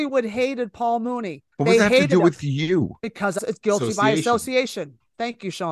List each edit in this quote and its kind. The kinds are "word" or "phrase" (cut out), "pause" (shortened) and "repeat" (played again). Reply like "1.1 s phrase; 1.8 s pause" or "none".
1.5 s pause; 3.0 s pause; 3.4 s word

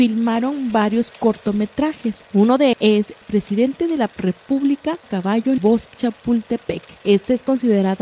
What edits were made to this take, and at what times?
2.7 s word; 3.2 s word; 5.0 s phrase; 5.6 s word; 5.9 s word

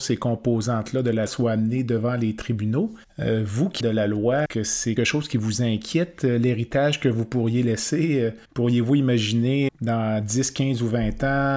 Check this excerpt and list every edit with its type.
1.3 s word; 3.0 s pause; 3.8 s phrase; 4.5 s word; 5.0 s word; 8.4 s pause; 9.7 s word

